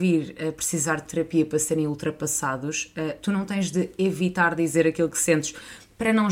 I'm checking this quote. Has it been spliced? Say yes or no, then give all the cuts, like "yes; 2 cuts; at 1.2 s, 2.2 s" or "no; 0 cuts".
no; 0 cuts